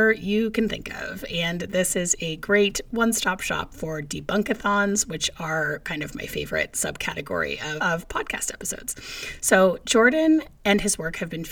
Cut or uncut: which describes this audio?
cut